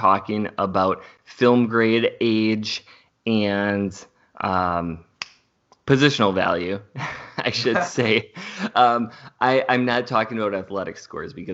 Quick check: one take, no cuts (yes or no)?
yes